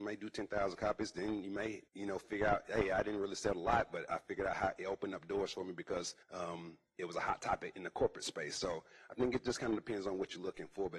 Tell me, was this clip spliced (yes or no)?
yes